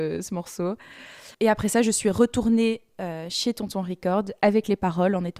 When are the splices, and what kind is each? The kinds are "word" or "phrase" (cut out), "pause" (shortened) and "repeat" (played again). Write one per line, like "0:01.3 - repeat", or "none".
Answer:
0:01.3 - pause